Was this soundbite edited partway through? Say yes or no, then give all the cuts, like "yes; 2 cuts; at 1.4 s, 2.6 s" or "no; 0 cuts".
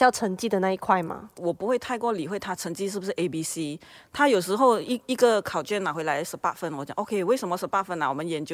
no; 0 cuts